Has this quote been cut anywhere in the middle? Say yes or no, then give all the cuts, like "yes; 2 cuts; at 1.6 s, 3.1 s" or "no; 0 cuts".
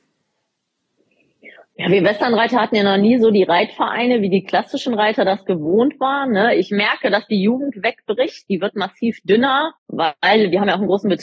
yes; 1 cut; at 9.8 s